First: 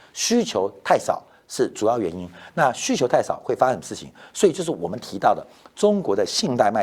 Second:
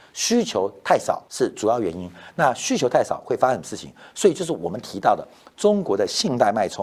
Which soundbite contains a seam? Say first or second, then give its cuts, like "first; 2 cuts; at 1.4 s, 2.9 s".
second; 1 cut; at 1.3 s